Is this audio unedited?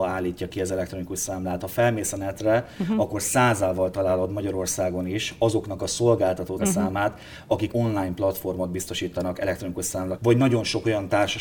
no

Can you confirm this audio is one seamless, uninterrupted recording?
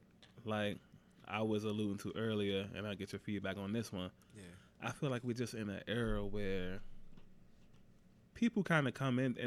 yes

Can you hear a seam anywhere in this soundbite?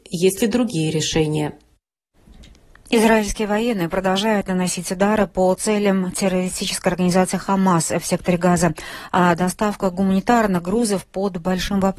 no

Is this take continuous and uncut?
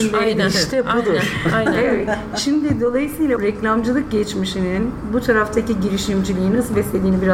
no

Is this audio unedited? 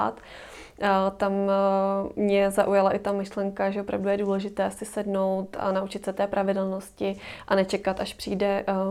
yes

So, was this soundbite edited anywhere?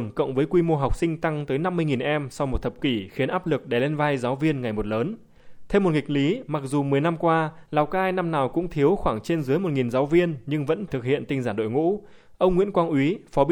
yes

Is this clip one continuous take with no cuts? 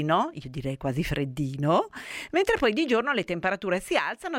yes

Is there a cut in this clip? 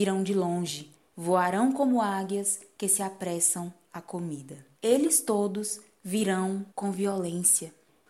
yes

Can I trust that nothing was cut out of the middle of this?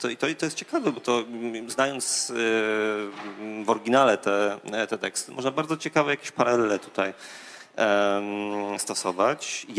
yes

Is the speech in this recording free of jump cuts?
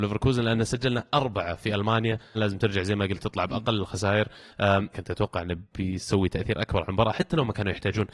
no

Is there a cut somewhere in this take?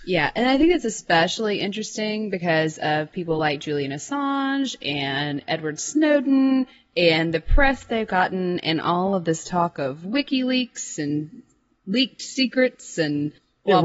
no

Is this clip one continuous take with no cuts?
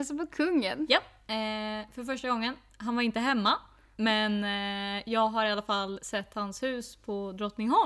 yes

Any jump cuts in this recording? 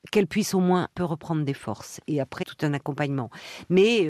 yes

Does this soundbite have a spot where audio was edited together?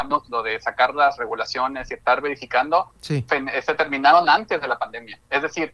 no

